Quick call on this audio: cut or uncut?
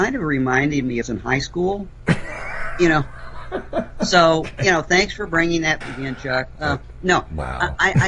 cut